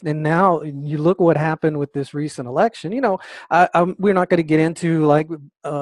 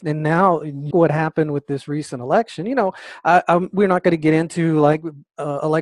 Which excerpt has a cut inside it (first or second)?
second